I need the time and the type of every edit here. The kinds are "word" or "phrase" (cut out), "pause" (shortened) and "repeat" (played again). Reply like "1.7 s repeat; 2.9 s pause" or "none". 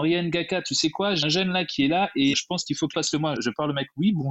1.2 s word; 2.3 s word; 2.9 s phrase; 3.4 s word

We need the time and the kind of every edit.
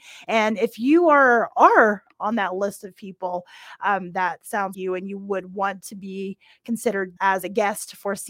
4.7 s word; 7.2 s pause

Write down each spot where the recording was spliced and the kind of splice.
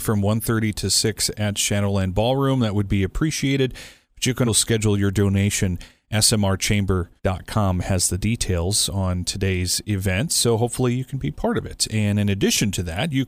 4.5 s word

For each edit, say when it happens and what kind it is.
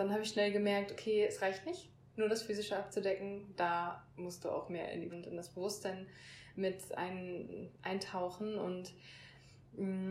5.1 s word

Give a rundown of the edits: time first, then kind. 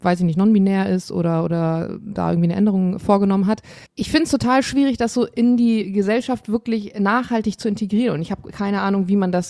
3.9 s pause

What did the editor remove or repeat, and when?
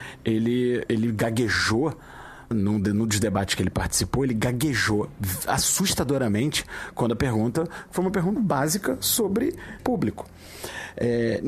2.5 s word; 8.4 s word; 9.8 s word

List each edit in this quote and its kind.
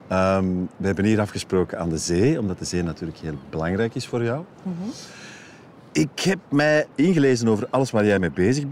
6.9 s phrase

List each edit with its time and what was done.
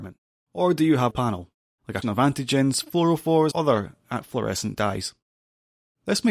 1.1 s phrase; 2.0 s word; 3.5 s word

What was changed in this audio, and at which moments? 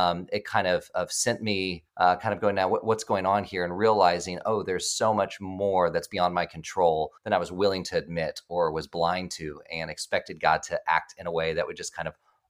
1.9 s pause; 7.2 s pause

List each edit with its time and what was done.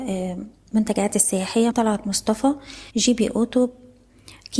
1.7 s phrase; 2.9 s pause

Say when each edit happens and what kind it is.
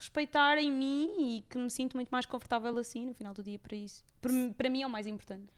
none

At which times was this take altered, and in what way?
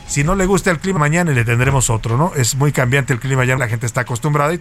1.0 s phrase; 3.6 s word

